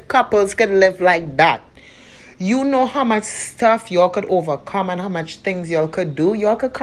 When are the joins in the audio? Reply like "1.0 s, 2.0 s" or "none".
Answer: none